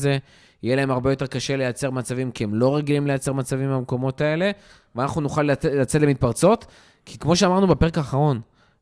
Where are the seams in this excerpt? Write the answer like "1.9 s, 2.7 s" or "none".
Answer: none

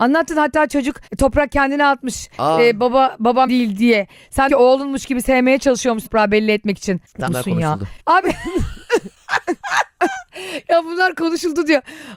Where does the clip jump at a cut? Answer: 1.1 s, 3.5 s, 4.5 s, 6.1 s, 7.3 s, 8.0 s

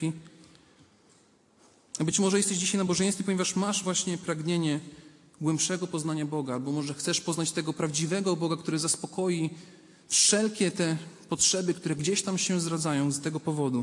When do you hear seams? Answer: none

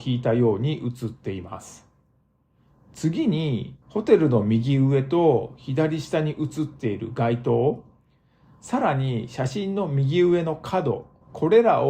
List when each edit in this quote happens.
3.8 s

